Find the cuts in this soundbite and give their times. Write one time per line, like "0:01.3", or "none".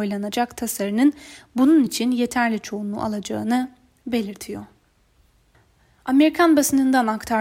none